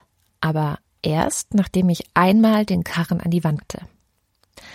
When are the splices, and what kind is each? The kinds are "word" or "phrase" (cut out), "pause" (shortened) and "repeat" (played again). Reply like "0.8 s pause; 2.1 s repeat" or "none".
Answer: 3.6 s word